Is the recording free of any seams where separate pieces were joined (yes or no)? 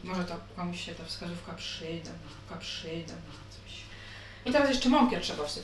no